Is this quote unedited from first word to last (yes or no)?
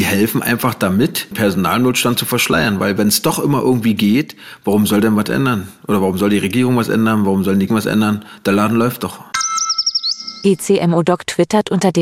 no